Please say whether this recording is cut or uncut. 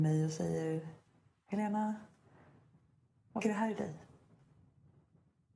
cut